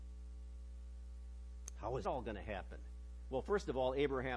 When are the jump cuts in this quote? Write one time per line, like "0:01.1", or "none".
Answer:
0:02.0